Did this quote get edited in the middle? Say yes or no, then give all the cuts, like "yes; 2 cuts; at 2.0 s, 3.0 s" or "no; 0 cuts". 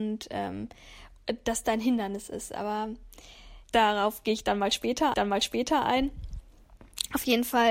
yes; 3 cuts; at 1.6 s, 3.6 s, 5.1 s